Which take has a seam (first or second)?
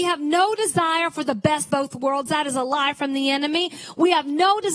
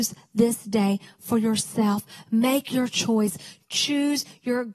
first